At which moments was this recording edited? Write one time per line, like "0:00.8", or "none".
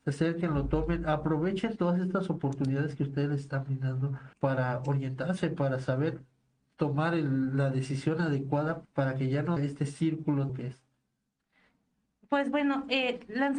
0:04.3
0:08.8
0:09.6
0:10.5